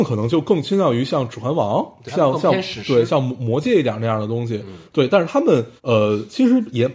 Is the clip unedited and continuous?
no; 2 cuts; at 2.1 s, 5.8 s

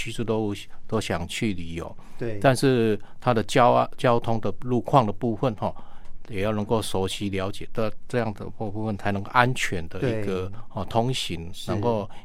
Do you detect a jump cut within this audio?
no; 0 cuts

